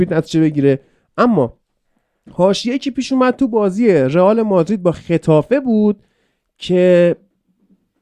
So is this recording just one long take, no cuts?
yes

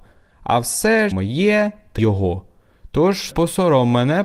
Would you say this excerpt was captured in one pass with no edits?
no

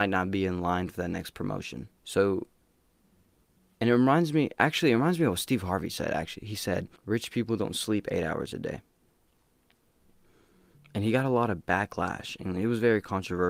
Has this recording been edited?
yes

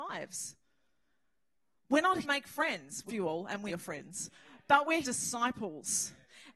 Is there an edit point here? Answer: yes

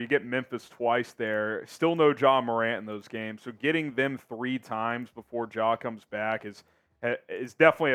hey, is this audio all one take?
yes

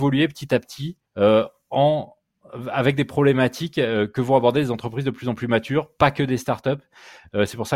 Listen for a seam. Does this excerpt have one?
yes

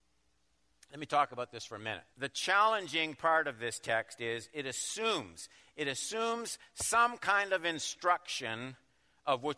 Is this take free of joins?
no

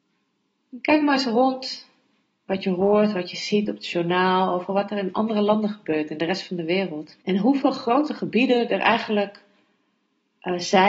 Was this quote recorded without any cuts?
no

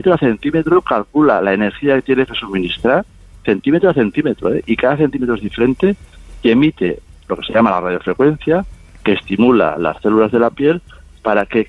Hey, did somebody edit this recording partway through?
no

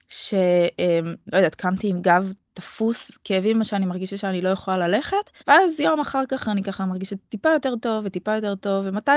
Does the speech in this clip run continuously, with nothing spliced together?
no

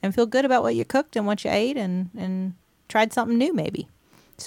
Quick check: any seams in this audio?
no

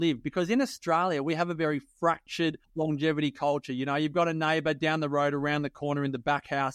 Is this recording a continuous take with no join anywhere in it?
no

